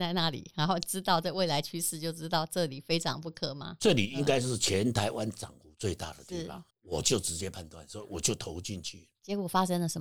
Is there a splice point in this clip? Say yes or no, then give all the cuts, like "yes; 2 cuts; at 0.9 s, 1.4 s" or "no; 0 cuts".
yes; 1 cut; at 6.7 s